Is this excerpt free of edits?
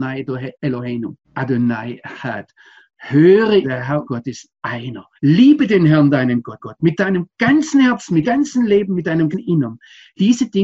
no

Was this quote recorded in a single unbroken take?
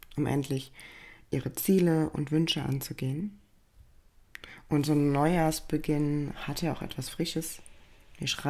yes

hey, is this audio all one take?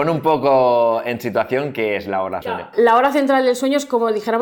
no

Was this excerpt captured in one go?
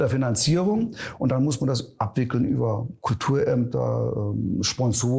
yes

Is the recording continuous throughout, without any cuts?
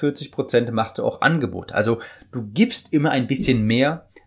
yes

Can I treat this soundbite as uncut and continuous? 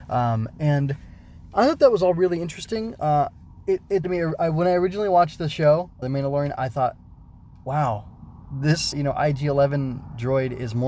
no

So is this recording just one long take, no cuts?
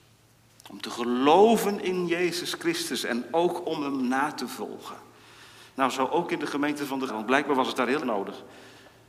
no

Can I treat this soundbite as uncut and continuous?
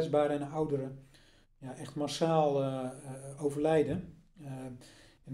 yes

